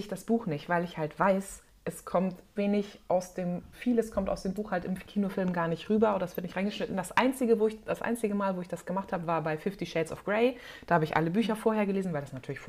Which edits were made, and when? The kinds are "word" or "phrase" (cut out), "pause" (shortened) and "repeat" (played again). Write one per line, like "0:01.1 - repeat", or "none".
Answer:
0:02.6 - word
0:03.7 - word